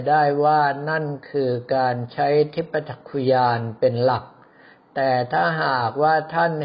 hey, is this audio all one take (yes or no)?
yes